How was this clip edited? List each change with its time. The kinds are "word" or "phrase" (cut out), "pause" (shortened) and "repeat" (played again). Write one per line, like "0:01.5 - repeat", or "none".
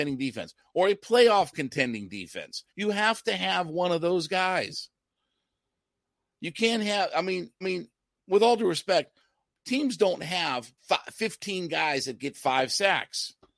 0:02.7 - pause
0:07.6 - repeat
0:10.8 - pause